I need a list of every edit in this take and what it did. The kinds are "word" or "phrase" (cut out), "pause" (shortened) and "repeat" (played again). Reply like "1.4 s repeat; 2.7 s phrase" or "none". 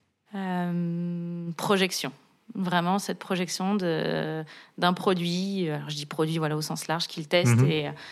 none